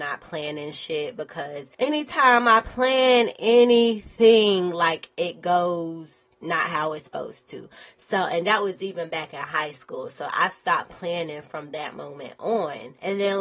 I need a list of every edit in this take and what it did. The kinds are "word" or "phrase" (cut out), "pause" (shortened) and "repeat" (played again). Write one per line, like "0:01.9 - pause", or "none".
none